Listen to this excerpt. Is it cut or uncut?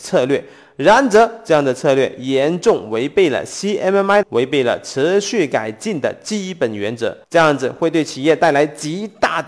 cut